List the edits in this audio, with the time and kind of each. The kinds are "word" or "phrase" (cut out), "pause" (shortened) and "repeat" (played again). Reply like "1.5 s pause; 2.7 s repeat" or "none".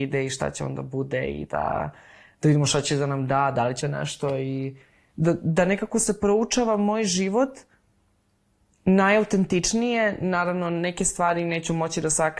3.8 s phrase